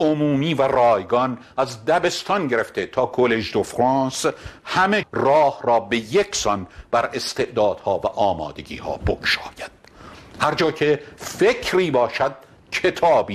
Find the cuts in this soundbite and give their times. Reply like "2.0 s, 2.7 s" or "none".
5.0 s